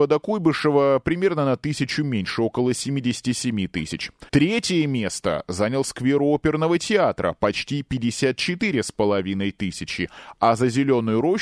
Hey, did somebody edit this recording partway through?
yes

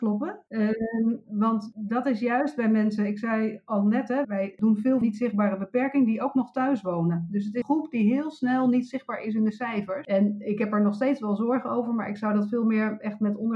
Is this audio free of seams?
no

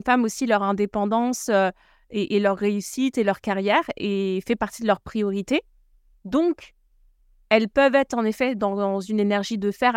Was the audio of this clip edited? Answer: no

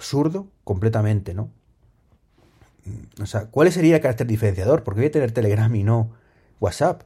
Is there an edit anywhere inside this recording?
no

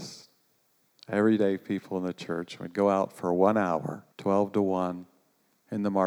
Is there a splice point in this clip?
yes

